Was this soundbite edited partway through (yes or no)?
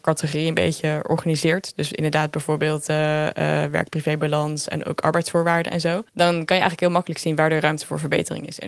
yes